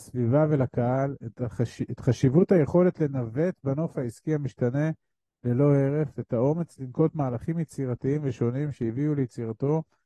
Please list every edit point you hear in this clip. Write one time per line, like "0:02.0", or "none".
none